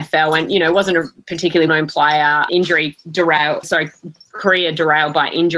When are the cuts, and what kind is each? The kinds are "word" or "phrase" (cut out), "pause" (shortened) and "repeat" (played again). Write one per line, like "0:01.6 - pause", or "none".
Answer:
0:01.7 - word
0:02.5 - word
0:03.6 - word